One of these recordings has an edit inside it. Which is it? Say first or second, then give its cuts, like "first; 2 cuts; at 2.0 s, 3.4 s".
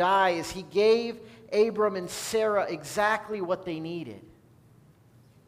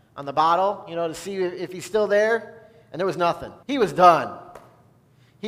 second; 1 cut; at 3.6 s